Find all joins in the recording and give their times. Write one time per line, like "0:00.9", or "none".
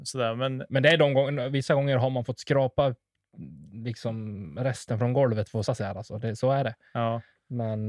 0:05.7